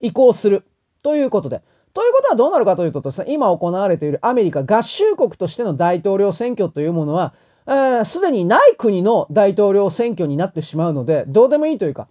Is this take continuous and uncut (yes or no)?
yes